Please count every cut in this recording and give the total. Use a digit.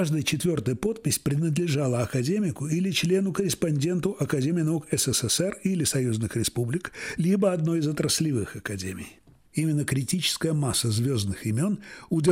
0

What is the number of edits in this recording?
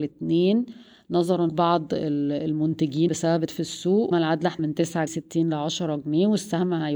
6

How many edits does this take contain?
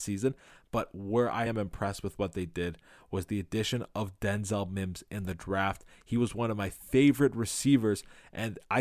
1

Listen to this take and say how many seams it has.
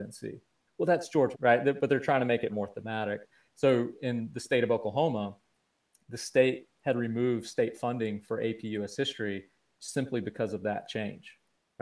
2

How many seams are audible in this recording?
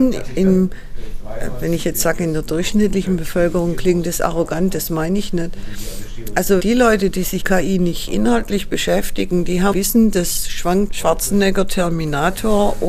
4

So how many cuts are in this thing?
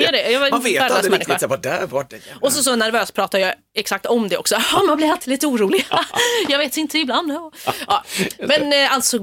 0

